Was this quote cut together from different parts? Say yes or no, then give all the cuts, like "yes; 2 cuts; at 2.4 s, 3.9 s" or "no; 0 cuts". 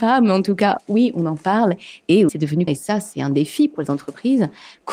yes; 2 cuts; at 2.3 s, 2.7 s